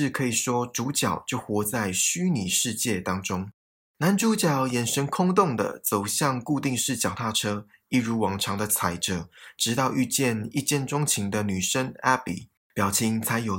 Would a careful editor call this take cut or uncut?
uncut